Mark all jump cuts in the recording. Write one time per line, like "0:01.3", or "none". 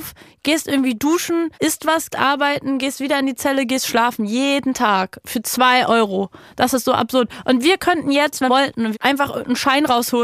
0:01.5
0:02.1
0:08.5
0:08.9